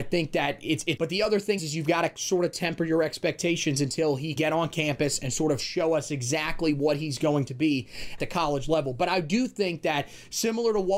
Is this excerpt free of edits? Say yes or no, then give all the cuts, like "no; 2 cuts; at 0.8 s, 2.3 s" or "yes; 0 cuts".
no; 4 cuts; at 1.0 s, 1.6 s, 4.4 s, 8.2 s